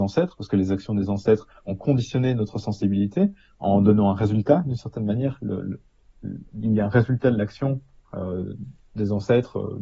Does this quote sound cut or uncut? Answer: uncut